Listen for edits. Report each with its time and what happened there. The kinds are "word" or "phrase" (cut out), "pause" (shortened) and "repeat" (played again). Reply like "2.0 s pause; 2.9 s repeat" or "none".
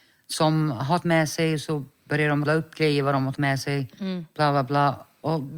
1.0 s word; 2.5 s word; 3.3 s word